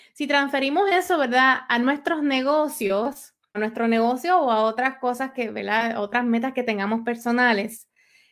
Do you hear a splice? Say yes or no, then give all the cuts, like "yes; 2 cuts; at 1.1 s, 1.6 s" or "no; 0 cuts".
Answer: yes; 1 cut; at 3.5 s